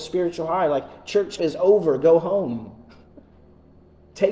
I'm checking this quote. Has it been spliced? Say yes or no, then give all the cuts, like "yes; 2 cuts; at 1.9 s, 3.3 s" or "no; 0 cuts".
yes; 1 cut; at 1.4 s